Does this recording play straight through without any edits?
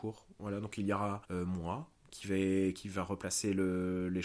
no; 1 cut; at 1.2 s

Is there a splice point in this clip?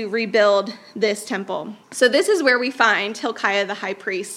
yes; 1 cut; at 1.8 s

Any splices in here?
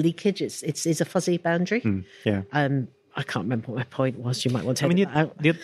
no; 0 cuts

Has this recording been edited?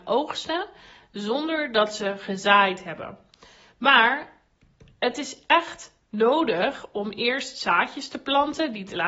no; 0 cuts

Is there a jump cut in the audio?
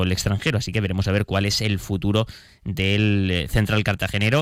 no; 0 cuts

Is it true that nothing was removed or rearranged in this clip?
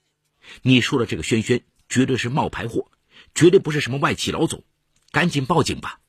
yes; 0 cuts

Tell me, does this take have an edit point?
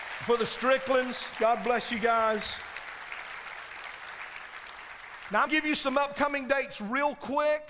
yes; 1 cut; at 5.5 s

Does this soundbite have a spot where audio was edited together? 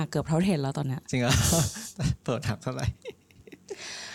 no; 0 cuts

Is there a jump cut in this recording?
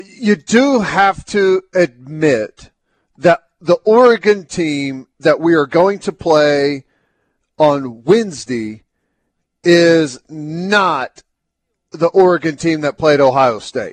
no; 0 cuts

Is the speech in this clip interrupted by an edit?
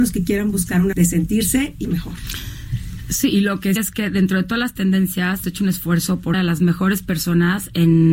yes; 5 cuts; at 0.9 s, 1.8 s, 3.8 s, 5.4 s, 6.3 s

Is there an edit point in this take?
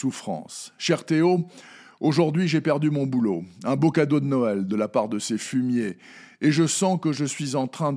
no; 0 cuts

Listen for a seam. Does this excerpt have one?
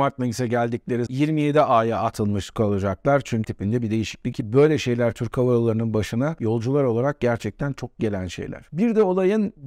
yes; 3 cuts; at 1.1 s, 3.4 s, 4.3 s

